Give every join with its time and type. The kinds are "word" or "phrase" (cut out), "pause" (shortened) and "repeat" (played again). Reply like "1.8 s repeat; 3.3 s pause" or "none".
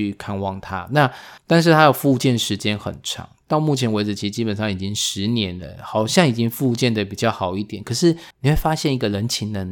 1.4 s pause; 8.3 s pause